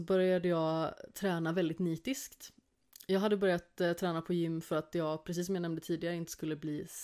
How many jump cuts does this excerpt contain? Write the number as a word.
zero